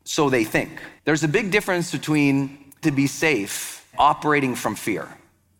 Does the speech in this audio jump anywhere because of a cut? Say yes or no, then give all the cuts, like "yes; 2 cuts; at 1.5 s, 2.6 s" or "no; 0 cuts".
yes; 3 cuts; at 1.0 s, 2.8 s, 3.9 s